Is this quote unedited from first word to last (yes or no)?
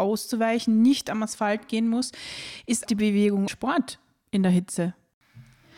no